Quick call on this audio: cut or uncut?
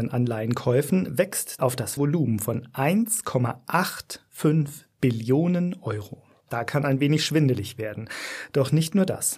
cut